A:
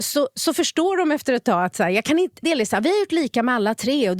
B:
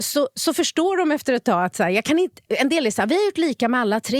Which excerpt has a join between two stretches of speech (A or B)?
A